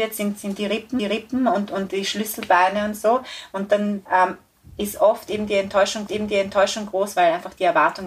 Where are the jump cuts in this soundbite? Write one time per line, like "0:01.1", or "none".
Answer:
0:01.0
0:01.9
0:04.1
0:06.1